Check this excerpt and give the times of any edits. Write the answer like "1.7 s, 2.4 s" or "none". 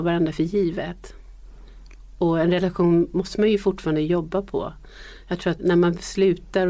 5.6 s